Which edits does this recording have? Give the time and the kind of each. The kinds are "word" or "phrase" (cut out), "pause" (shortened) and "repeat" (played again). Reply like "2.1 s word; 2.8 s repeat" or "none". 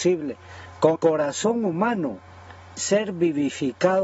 0.9 s word; 2.8 s word

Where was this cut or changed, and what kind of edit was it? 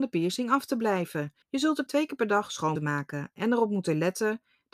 1.4 s pause; 1.9 s word; 2.8 s word

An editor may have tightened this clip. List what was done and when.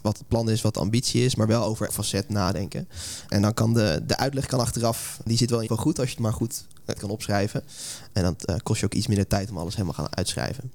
1.9 s word; 4.1 s word; 5.7 s word; 7.0 s word

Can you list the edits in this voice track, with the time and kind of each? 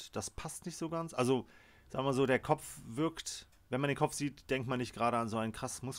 none

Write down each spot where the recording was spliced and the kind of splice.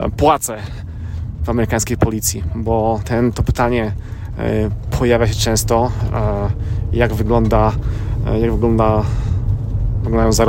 3.0 s word

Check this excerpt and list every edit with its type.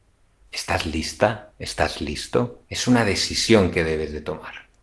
2.7 s pause

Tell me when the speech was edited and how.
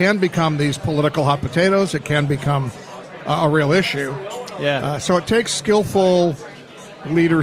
none

